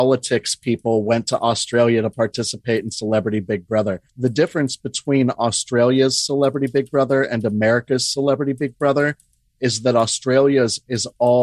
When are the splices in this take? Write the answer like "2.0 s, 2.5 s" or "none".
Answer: 4.1 s

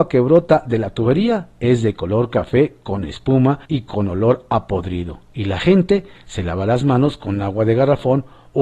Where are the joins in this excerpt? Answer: 3.6 s, 5.3 s

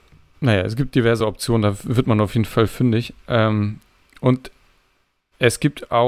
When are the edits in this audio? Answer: none

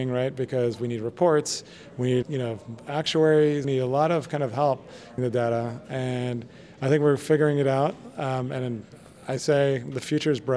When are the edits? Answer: 2.2 s, 3.6 s, 5.2 s

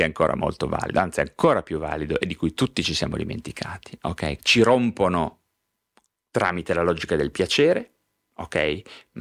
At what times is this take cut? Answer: 4.4 s

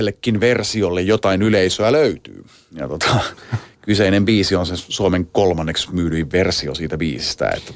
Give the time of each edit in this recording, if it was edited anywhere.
none

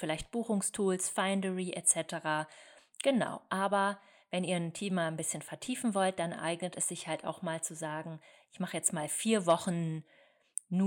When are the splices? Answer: none

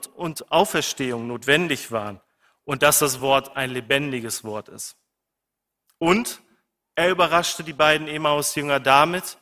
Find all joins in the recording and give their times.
none

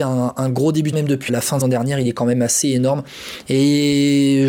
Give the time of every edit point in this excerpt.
0.9 s, 1.3 s, 1.6 s

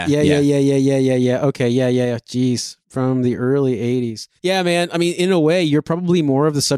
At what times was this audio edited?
2.8 s, 4.4 s

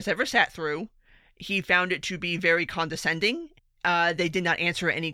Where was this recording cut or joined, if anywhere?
3.6 s

